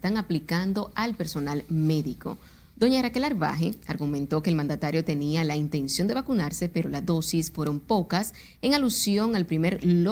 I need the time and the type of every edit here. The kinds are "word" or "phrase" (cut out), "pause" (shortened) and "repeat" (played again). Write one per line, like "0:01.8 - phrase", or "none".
none